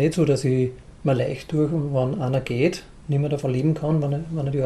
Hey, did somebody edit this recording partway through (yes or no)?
no